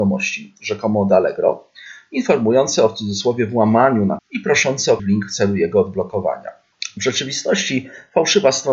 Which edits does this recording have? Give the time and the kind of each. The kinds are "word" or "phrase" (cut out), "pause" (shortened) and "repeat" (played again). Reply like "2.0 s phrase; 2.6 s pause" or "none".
4.2 s word; 5.0 s word